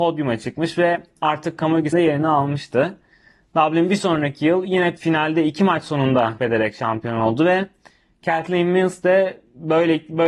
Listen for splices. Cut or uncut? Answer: cut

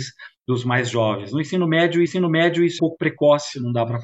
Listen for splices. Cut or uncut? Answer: cut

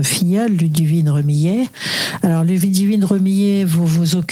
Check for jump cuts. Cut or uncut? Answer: uncut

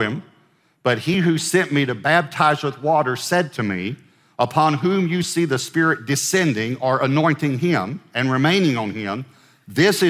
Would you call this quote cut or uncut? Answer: uncut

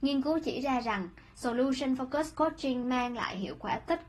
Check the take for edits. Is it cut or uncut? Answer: uncut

